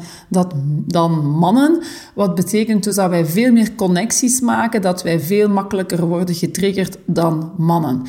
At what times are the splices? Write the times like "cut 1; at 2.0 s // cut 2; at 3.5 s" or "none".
none